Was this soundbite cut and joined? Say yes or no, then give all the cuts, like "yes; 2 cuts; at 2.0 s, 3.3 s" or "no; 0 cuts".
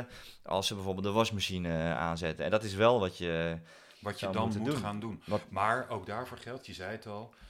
no; 0 cuts